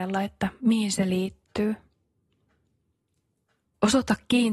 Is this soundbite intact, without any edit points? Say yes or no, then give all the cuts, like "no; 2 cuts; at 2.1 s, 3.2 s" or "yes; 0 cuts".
yes; 0 cuts